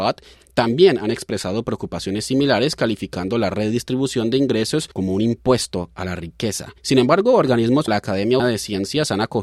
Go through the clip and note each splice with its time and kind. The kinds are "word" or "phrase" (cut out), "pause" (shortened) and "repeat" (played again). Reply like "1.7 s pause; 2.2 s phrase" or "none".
4.9 s pause; 6.8 s pause; 7.9 s word; 8.4 s word